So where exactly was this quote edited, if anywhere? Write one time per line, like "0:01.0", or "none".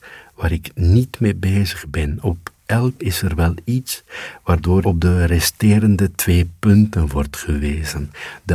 0:03.0
0:04.8